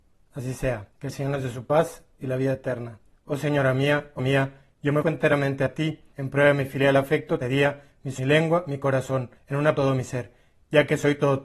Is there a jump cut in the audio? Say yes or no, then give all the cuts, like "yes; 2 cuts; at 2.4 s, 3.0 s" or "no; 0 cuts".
yes; 9 cuts; at 0.9 s, 3.1 s, 4.2 s, 5.0 s, 6.1 s, 7.4 s, 8.2 s, 9.4 s, 9.8 s